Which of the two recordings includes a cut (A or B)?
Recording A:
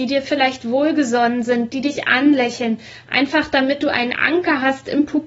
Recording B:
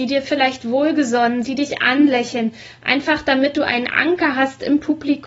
B